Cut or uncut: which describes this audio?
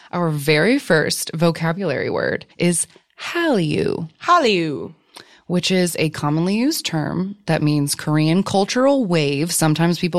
cut